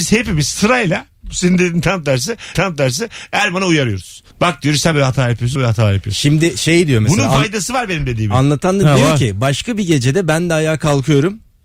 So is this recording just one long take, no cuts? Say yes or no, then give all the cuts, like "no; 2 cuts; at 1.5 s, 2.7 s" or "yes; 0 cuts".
no; 4 cuts; at 2.5 s, 4.3 s, 4.9 s, 5.6 s